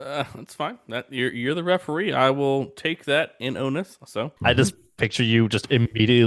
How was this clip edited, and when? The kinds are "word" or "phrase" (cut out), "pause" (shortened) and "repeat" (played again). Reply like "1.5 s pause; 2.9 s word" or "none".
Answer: 4.4 s pause